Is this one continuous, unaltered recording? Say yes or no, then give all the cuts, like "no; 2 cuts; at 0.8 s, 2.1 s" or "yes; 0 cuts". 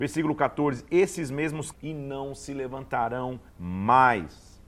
no; 2 cuts; at 1.7 s, 3.5 s